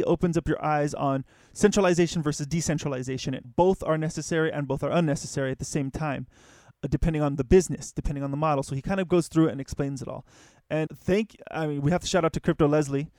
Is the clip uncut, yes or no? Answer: no